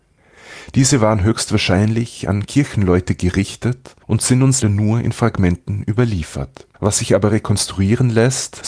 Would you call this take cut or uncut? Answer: cut